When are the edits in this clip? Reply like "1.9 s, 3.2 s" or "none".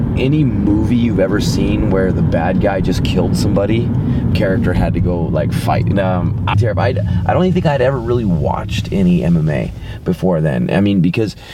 4.3 s, 5.9 s, 6.5 s